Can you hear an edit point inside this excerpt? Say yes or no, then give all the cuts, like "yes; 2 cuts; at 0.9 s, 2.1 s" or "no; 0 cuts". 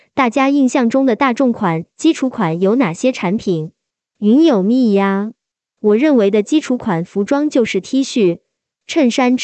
no; 0 cuts